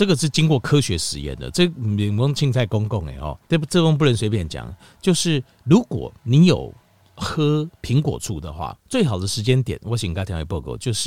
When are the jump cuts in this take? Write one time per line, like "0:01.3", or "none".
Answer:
0:03.4
0:06.2
0:08.8